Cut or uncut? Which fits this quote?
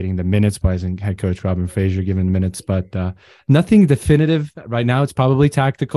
uncut